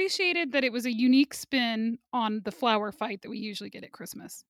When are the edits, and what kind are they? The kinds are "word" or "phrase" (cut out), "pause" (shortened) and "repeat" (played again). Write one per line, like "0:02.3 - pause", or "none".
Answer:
none